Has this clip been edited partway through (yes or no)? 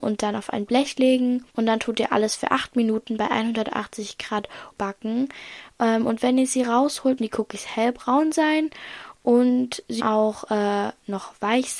yes